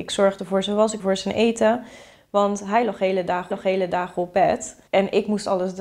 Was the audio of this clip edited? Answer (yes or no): yes